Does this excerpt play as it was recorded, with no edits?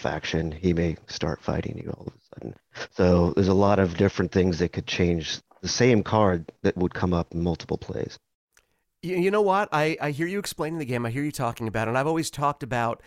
yes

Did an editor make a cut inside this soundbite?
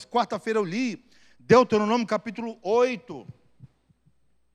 no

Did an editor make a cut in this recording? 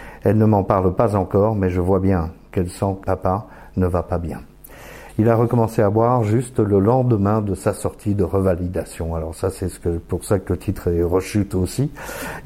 yes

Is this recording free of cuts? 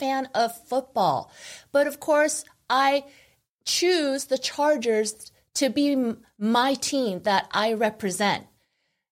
yes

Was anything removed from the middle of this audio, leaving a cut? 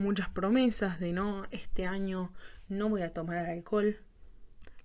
no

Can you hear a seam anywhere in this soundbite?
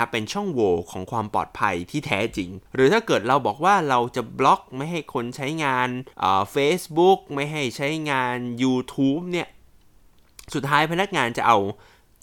yes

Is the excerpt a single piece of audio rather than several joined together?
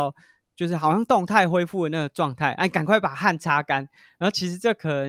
yes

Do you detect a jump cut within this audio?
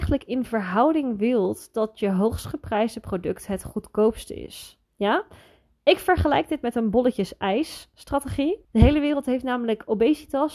yes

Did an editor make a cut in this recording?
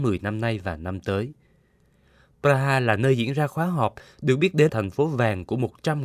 yes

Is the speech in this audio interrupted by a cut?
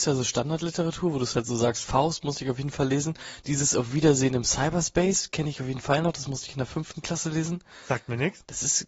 no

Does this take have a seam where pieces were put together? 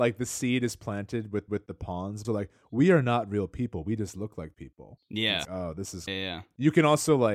yes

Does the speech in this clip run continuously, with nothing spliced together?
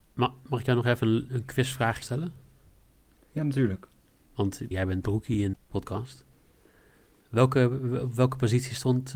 no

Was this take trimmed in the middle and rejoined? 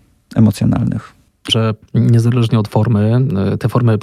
yes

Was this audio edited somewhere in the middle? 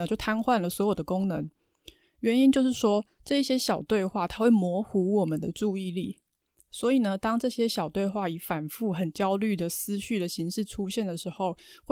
no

